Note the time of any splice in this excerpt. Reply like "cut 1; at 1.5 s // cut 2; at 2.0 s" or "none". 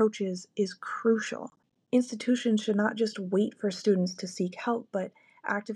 cut 1; at 1.6 s